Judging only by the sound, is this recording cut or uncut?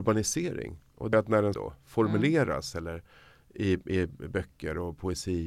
cut